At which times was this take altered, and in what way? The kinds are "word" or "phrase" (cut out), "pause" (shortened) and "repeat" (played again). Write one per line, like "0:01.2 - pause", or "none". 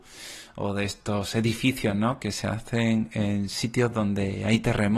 none